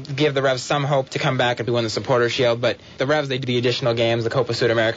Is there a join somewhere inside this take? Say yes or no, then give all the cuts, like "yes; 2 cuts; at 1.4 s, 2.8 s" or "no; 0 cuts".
yes; 4 cuts; at 1.1 s, 1.7 s, 3.0 s, 3.4 s